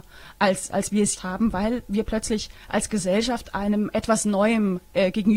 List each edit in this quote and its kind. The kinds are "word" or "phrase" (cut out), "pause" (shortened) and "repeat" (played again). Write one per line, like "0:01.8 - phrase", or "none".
0:01.2 - word